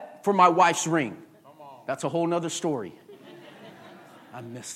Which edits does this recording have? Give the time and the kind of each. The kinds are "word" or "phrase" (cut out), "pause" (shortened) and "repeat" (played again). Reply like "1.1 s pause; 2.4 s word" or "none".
none